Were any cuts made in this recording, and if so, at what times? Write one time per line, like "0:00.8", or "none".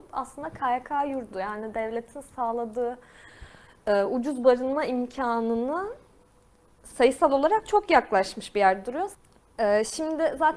none